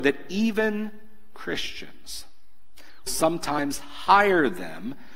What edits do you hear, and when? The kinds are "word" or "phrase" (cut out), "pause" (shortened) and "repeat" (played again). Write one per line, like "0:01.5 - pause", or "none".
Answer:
0:03.1 - word